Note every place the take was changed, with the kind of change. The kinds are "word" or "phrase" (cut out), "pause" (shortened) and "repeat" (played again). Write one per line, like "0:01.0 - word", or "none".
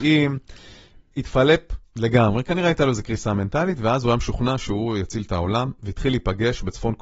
0:01.8 - pause